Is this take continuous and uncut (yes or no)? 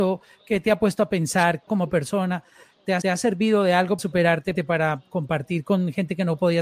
no